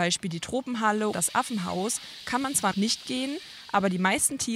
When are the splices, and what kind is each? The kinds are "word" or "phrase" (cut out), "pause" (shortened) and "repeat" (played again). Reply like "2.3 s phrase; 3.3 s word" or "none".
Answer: 1.1 s word; 2.7 s word